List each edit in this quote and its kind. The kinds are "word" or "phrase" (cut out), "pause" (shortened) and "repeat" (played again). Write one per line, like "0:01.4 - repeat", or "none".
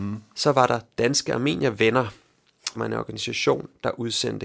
0:02.8 - word